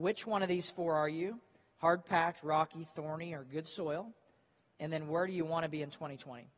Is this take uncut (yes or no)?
yes